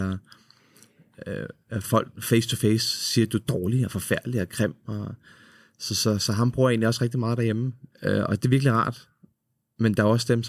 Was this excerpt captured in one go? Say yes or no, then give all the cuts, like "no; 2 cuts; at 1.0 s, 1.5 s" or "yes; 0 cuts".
no; 1 cut; at 7.9 s